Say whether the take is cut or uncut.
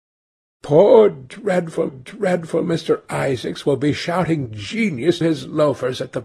cut